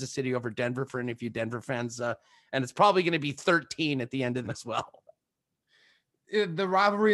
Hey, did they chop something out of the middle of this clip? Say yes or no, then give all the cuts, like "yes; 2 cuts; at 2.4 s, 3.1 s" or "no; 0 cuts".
yes; 1 cut; at 4.4 s